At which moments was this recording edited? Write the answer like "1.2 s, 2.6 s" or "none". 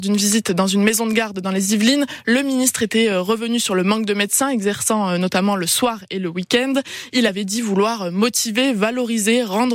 none

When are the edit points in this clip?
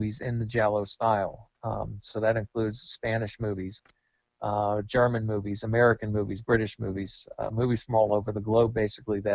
none

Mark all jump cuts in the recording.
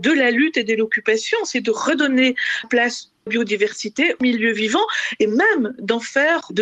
2.6 s, 3.3 s, 4.2 s

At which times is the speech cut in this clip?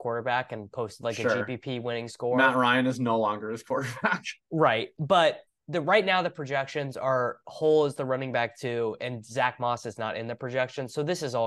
none

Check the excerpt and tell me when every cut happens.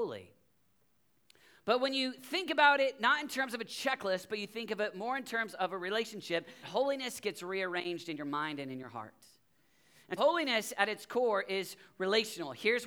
6.6 s, 10.2 s

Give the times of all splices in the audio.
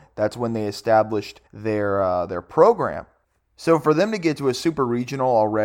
1.5 s, 3.2 s

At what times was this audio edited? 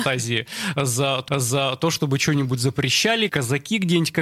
1.3 s, 3.3 s

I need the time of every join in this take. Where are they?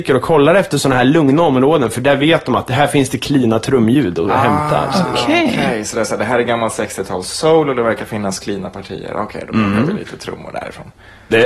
none

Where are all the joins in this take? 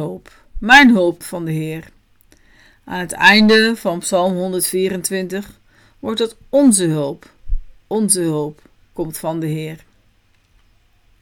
1.2 s

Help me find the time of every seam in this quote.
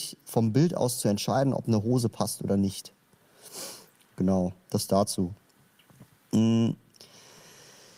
none

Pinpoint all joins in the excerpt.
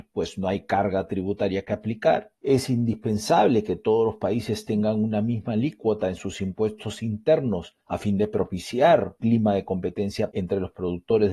2.4 s, 7.8 s, 9.2 s, 10.3 s

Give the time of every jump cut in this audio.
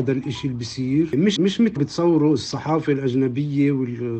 1.4 s, 1.8 s

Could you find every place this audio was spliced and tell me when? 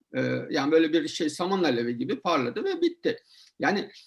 none

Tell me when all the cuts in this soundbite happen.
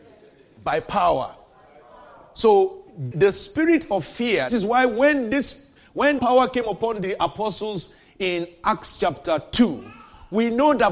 3.1 s, 4.5 s, 6.2 s

